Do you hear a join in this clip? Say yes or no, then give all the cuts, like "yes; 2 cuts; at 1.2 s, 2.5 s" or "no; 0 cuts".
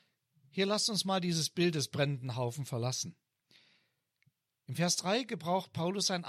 no; 0 cuts